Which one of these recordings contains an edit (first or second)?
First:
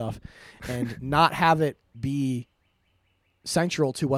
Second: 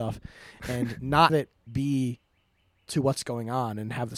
second